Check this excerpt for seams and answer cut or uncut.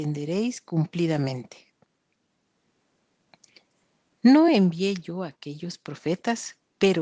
uncut